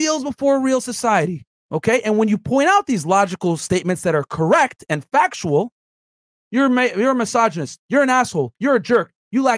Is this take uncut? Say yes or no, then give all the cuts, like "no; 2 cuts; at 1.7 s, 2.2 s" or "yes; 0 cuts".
no; 1 cut; at 1.5 s